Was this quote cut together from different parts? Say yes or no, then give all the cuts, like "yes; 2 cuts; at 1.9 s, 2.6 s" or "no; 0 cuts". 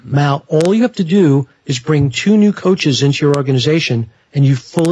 no; 0 cuts